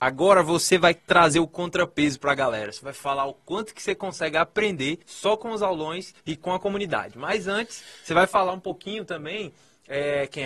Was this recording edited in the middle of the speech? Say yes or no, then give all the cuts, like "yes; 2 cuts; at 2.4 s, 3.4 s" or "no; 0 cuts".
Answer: yes; 3 cuts; at 1.0 s, 5.0 s, 6.2 s